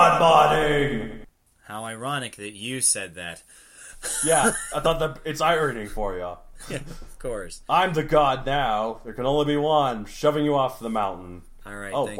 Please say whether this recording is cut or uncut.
cut